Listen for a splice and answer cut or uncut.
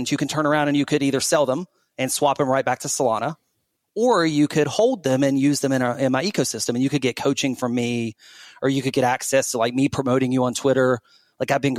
uncut